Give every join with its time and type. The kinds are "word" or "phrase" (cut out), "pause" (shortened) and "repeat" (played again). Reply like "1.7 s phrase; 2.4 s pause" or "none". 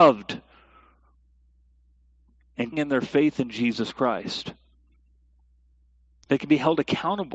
2.7 s word